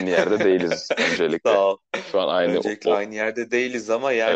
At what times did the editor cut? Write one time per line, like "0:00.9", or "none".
0:01.9